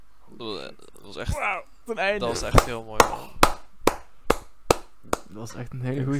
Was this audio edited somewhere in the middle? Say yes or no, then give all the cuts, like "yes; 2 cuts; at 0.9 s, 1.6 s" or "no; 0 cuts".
yes; 1 cut; at 1.9 s